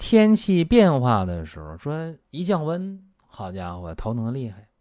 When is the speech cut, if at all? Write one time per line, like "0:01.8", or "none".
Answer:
0:02.2
0:03.1